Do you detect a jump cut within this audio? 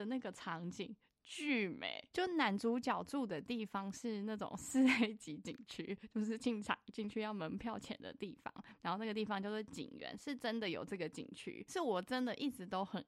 no; 0 cuts

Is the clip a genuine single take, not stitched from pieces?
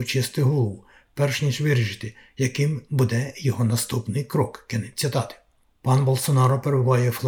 yes; 0 cuts

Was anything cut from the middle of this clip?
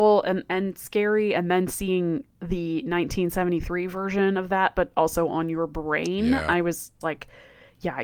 yes; 1 cut; at 7.0 s

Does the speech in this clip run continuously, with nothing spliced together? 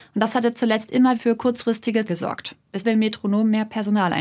no; 3 cuts; at 1.1 s, 2.1 s, 2.8 s

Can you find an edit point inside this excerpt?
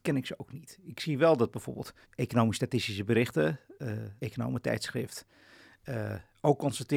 yes; 2 cuts; at 2.0 s, 4.2 s

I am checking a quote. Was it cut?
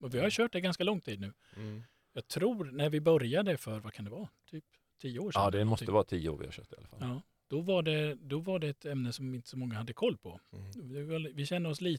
no; 0 cuts

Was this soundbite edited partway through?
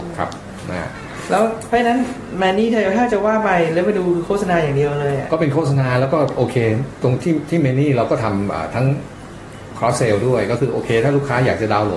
no; 0 cuts

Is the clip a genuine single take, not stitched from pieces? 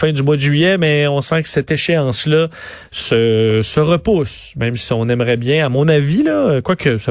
yes; 0 cuts

